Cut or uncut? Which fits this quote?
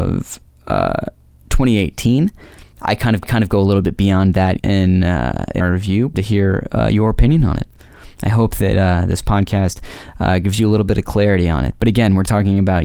cut